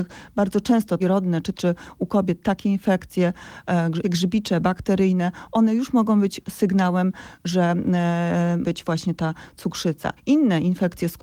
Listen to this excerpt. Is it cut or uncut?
cut